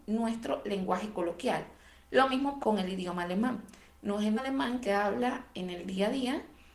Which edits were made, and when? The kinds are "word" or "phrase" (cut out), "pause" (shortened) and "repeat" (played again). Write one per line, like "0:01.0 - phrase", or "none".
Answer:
0:02.6 - word
0:04.4 - word
0:04.8 - word